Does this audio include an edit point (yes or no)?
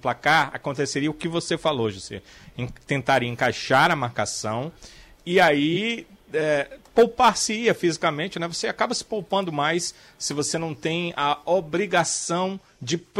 no